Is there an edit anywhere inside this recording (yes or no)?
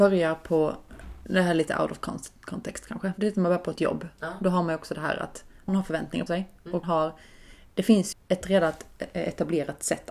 yes